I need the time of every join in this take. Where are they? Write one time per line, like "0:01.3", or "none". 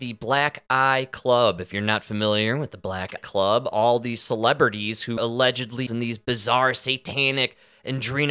0:03.2
0:05.2
0:05.9